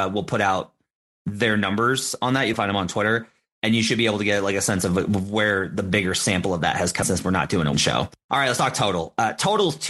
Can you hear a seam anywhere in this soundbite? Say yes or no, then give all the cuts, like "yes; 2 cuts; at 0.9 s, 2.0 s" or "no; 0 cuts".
yes; 3 cuts; at 2.5 s, 7.0 s, 7.7 s